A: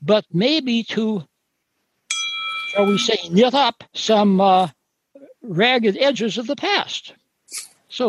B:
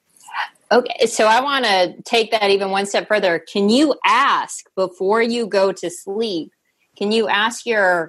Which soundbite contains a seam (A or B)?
A